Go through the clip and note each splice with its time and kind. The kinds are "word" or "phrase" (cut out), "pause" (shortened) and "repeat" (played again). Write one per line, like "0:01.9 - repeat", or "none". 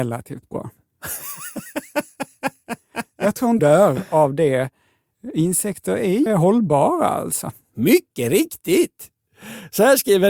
0:03.6 - word
0:06.3 - word